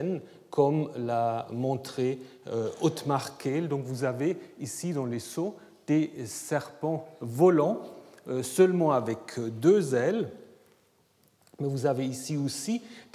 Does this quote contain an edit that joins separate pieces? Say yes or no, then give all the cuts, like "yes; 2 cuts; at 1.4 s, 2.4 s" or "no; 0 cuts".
no; 0 cuts